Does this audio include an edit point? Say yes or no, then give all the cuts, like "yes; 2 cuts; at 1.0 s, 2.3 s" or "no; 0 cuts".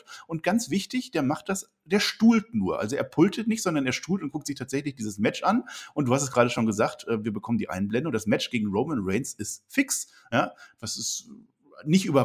no; 0 cuts